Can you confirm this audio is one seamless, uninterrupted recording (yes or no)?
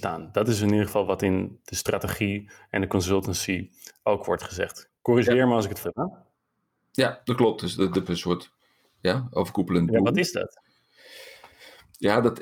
no